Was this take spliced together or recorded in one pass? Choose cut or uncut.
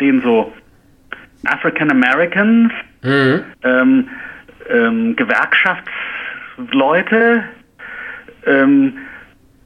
cut